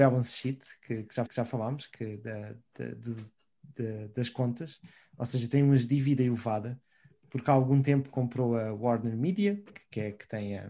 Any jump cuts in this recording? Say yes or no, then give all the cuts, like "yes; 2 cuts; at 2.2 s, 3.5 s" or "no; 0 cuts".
yes; 2 cuts; at 1.3 s, 9.7 s